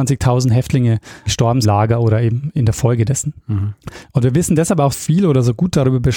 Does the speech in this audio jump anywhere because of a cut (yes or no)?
yes